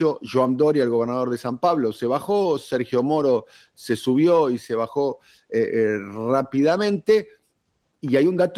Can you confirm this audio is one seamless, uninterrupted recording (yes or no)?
yes